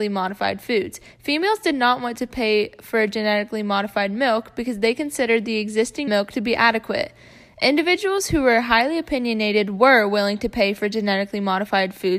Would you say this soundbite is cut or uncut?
cut